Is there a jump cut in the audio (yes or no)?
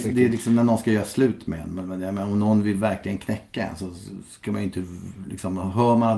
no